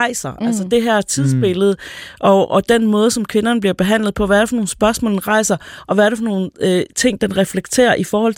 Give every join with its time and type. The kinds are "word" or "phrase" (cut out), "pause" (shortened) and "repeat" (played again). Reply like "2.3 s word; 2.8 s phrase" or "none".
none